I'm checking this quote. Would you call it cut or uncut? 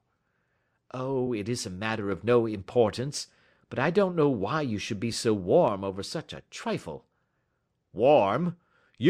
uncut